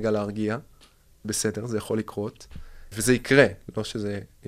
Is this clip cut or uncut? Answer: cut